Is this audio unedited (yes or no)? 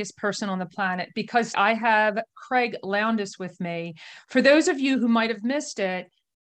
no